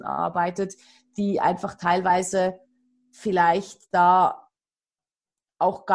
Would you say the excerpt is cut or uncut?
uncut